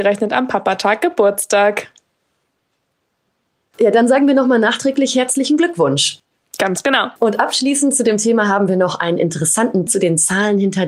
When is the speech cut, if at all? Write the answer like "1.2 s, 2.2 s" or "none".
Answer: 7.2 s, 9.9 s